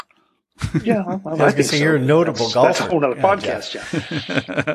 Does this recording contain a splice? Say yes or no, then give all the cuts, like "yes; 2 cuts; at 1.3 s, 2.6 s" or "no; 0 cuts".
no; 0 cuts